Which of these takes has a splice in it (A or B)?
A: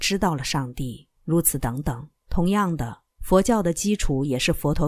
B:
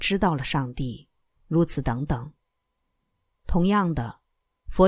A